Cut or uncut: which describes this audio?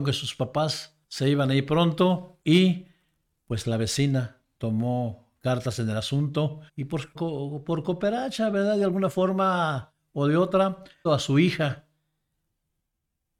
cut